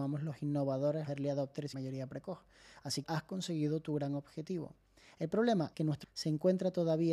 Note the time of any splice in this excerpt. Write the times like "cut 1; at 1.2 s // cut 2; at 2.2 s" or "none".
cut 1; at 1.0 s // cut 2; at 1.7 s // cut 3; at 3.0 s // cut 4; at 5.7 s // cut 5; at 6.0 s